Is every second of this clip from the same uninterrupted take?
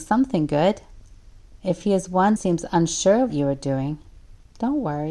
no; 3 cuts; at 1.6 s, 2.4 s, 3.3 s

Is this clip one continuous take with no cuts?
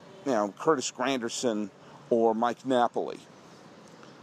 yes; 0 cuts

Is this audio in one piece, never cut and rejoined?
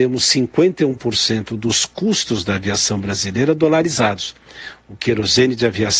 yes; 0 cuts

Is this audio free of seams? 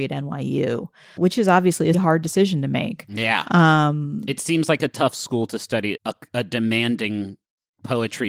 no; 3 cuts; at 1.2 s, 1.9 s, 6.0 s

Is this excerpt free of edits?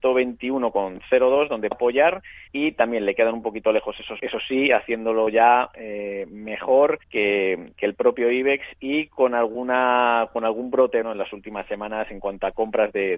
no; 5 cuts; at 1.7 s, 2.5 s, 4.2 s, 7.0 s, 11.0 s

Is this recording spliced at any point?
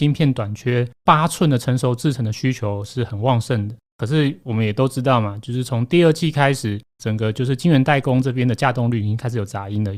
no; 0 cuts

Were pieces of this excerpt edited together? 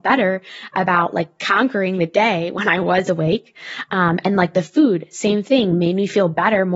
no; 0 cuts

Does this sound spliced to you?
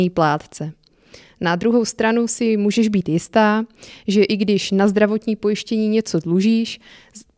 no; 0 cuts

